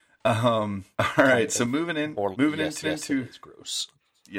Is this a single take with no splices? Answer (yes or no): no